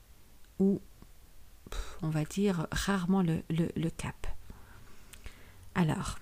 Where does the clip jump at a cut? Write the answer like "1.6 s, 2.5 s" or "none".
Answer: none